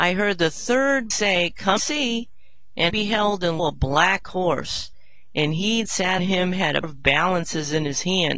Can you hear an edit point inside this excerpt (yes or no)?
yes